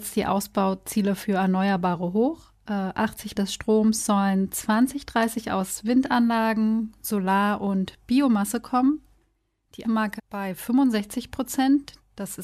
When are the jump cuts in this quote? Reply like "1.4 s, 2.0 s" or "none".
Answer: 3.3 s, 9.8 s, 10.2 s